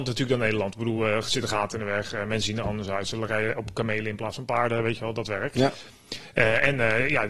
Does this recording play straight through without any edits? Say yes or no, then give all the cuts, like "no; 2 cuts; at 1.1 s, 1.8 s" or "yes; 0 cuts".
yes; 0 cuts